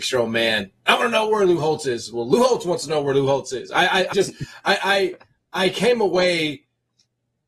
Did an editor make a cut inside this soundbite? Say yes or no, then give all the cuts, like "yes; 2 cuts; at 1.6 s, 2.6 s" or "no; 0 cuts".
yes; 1 cut; at 4.1 s